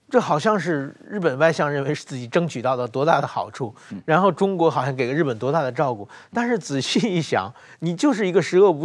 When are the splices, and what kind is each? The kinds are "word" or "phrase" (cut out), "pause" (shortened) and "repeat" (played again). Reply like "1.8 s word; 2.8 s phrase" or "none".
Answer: none